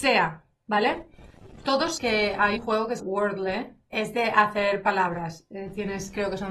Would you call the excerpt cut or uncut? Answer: cut